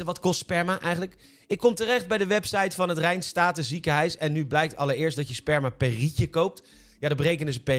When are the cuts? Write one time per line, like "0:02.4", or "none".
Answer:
none